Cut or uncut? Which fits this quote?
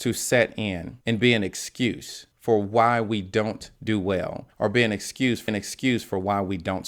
cut